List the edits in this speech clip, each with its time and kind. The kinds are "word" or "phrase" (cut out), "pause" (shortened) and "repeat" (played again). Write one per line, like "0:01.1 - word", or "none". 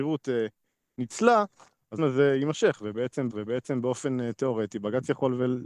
0:02.0 - word
0:03.3 - repeat